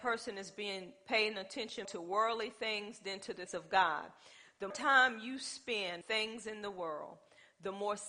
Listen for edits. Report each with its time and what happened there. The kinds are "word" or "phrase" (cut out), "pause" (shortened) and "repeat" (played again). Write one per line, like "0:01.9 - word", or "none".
0:01.8 - word
0:03.5 - word
0:04.7 - word
0:06.0 - word